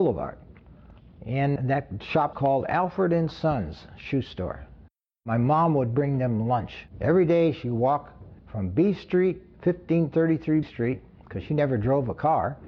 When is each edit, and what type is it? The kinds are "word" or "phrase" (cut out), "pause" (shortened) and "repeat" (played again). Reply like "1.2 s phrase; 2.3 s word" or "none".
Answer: 1.6 s word; 2.3 s word; 8.4 s pause; 10.6 s word